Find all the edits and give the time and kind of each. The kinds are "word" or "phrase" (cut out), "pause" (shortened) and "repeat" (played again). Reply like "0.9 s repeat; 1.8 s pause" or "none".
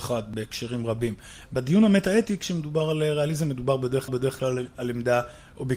4.1 s repeat

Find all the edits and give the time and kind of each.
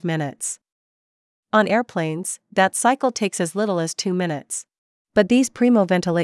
4.8 s pause

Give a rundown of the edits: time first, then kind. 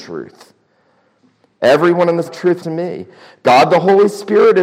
2.2 s word; 2.6 s word

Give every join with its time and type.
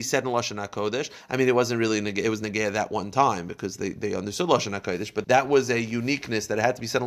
5.2 s phrase

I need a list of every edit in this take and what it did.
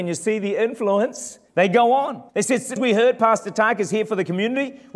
1.5 s pause; 2.3 s pause; 2.8 s word

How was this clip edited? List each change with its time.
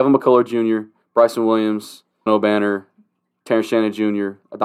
1.0 s pause; 2.3 s word

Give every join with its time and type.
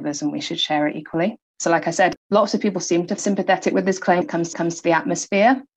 1.4 s pause; 2.2 s pause; 3.2 s phrase; 4.2 s word; 4.5 s repeat

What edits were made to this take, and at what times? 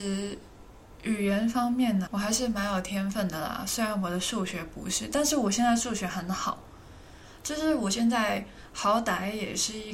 2.1 s word

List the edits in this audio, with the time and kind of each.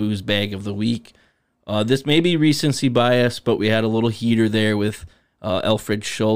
none

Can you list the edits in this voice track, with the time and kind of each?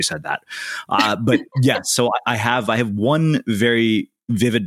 none

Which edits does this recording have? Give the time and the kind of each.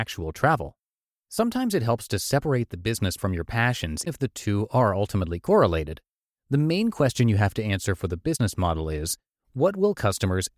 3.2 s word; 4.1 s word

